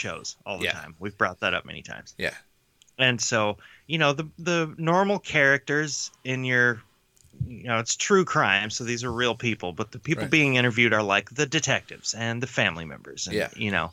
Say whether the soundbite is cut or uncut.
uncut